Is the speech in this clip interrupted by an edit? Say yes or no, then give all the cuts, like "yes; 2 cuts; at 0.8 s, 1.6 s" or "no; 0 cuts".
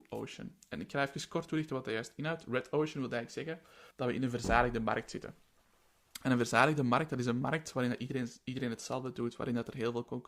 yes; 1 cut; at 3.9 s